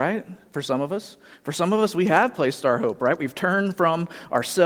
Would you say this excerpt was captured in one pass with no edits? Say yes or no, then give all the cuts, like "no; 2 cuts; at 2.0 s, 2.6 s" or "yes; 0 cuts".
yes; 0 cuts